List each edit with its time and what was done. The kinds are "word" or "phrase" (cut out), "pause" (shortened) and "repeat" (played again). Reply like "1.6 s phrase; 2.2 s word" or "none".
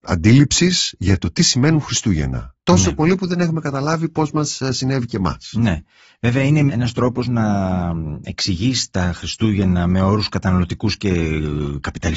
none